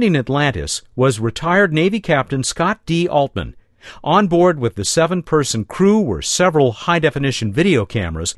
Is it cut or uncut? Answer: uncut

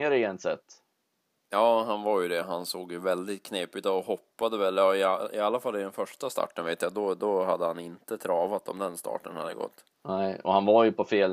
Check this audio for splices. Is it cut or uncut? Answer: uncut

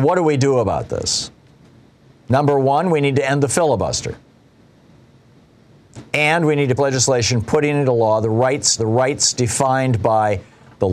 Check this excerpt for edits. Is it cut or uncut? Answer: cut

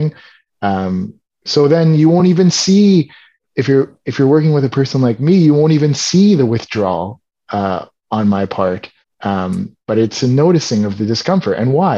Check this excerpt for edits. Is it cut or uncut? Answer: uncut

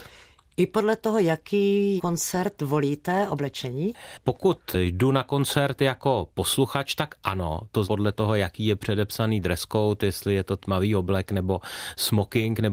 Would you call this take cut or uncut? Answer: cut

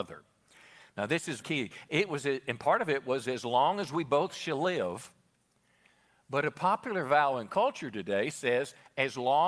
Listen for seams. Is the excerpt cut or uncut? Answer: cut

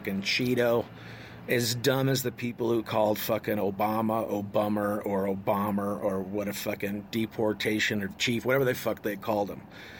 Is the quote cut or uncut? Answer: uncut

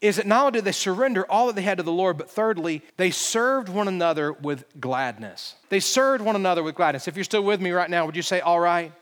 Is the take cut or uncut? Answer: cut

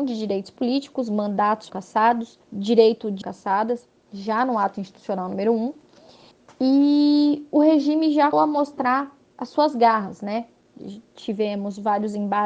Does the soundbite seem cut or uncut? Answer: cut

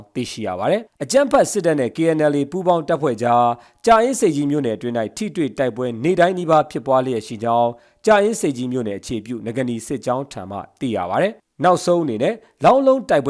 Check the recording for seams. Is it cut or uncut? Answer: uncut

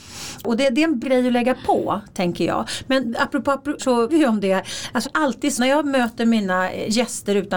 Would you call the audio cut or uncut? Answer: cut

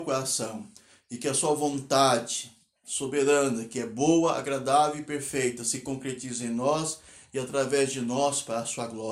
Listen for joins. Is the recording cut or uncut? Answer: uncut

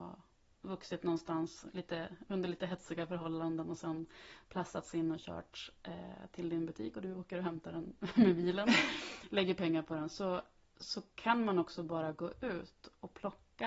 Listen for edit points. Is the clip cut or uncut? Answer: uncut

